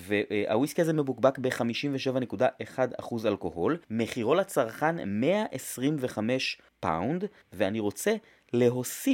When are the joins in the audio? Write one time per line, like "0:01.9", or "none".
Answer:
0:03.8